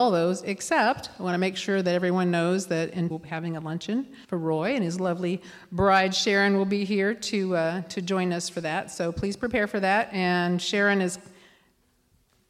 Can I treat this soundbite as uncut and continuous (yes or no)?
no